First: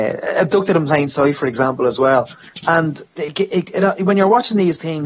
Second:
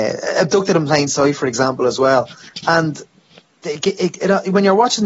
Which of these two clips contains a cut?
first; 1 cut; at 3.1 s

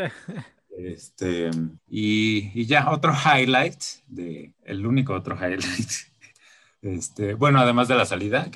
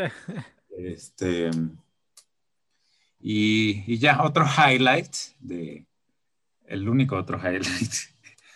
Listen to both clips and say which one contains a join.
first; 2 cuts; at 1.8 s, 4.5 s

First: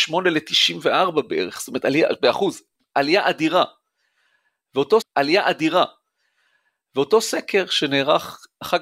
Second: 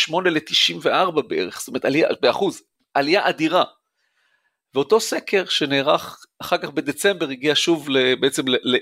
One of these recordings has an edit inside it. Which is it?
first; 1 cut; at 5.0 s

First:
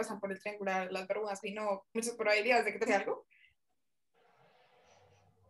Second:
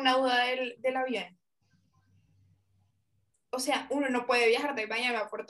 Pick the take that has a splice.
first; 3 cuts; at 1.4 s, 1.9 s, 2.9 s

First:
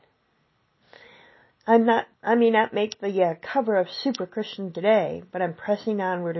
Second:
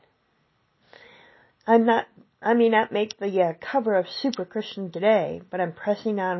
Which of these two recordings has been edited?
first; 1 cut; at 2.1 s

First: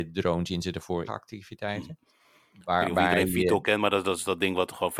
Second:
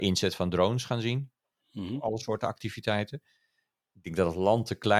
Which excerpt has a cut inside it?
first; 1 cut; at 1.1 s

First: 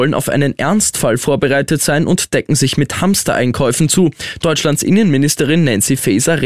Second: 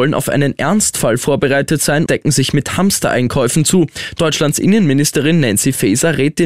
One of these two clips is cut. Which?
second; 1 cut; at 2.1 s

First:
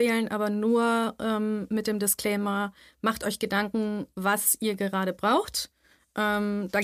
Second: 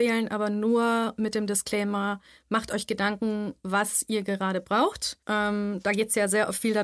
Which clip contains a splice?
second; 2 cuts; at 1.2 s, 5.2 s

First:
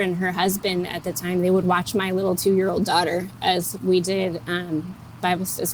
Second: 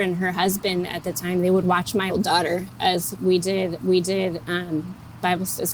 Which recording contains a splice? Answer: second; 2 cuts; at 2.1 s, 3.8 s

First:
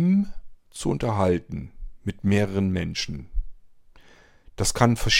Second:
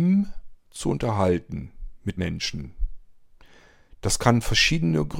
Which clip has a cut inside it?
second; 1 cut; at 2.2 s

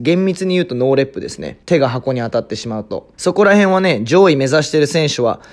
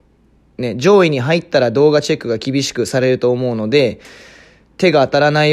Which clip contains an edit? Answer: first; 2 cuts; at 1.6 s, 3.1 s

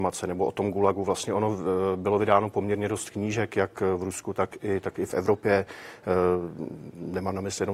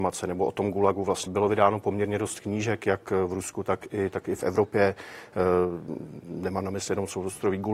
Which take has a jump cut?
second; 1 cut; at 1.3 s

